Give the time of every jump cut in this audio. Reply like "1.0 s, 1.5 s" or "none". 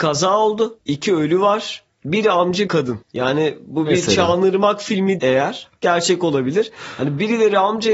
2.7 s, 3.0 s, 5.2 s